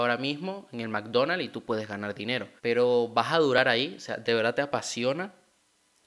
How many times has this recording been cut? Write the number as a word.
one